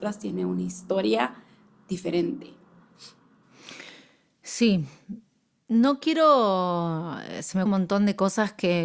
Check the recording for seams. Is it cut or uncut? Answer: cut